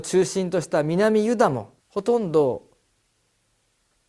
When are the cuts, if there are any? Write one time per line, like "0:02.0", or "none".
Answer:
0:01.8

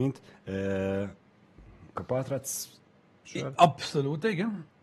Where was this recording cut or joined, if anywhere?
0:01.9

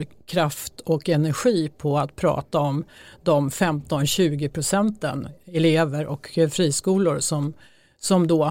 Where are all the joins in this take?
none

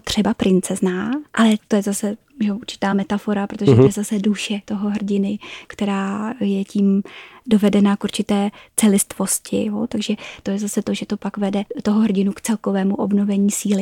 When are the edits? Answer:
none

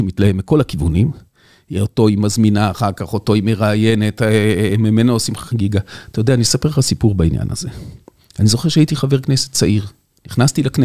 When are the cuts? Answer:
none

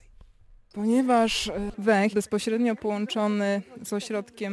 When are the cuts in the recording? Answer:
0:02.1

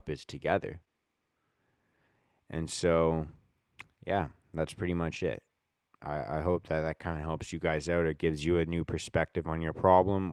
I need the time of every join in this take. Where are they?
none

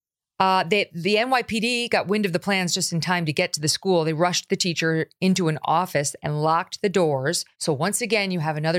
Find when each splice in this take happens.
0:07.5

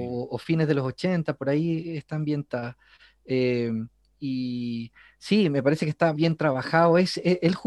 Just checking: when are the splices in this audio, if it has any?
0:06.1

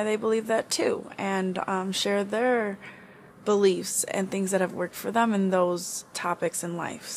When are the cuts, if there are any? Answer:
none

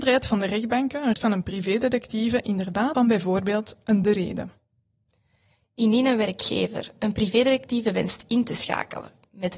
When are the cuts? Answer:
0:01.1
0:02.9
0:04.0

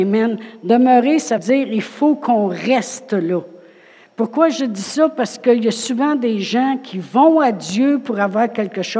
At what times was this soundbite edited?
0:01.4

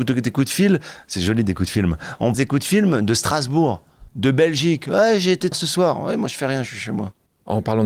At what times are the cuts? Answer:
0:02.3
0:04.1
0:05.5

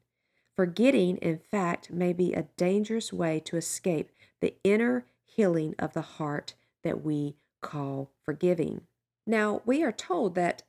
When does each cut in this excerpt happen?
none

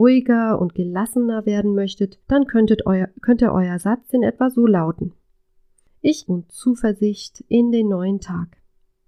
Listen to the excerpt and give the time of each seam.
0:02.2
0:06.3

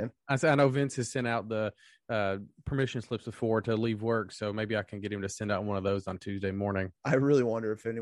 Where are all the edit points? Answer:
none

